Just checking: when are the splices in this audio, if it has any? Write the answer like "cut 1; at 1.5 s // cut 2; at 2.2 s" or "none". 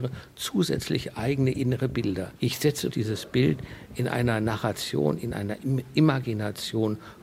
cut 1; at 2.9 s